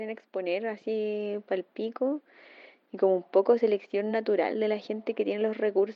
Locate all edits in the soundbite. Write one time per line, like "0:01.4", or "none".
none